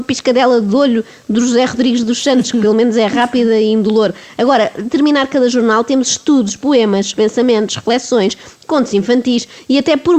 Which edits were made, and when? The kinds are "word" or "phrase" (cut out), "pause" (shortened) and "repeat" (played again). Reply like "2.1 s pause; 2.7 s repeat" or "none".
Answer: none